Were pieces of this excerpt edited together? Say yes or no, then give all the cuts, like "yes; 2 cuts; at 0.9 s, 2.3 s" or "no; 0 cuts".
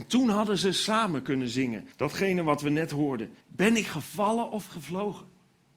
yes; 2 cuts; at 1.9 s, 3.4 s